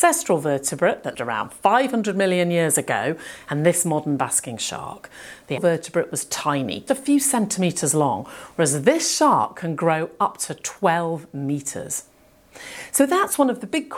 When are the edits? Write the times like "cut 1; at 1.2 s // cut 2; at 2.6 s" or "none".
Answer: cut 1; at 1.1 s // cut 2; at 5.6 s // cut 3; at 6.9 s